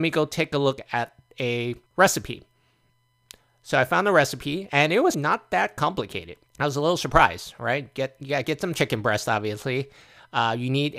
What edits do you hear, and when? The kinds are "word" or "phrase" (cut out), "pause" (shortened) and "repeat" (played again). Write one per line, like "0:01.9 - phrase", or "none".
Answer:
0:01.9 - pause
0:05.1 - word
0:06.5 - pause